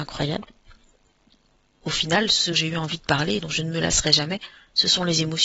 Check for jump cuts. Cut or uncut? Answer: cut